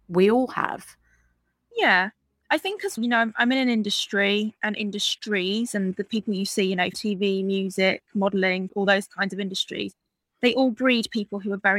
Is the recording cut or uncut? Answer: cut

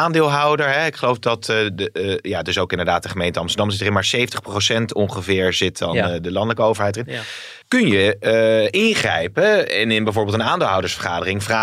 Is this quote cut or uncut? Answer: cut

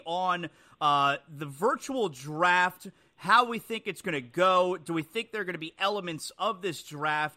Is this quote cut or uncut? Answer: uncut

